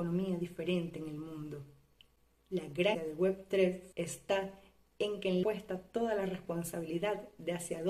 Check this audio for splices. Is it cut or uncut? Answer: cut